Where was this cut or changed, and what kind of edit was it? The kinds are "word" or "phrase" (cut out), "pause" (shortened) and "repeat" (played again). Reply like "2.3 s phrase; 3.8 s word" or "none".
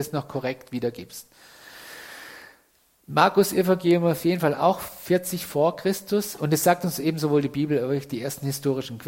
none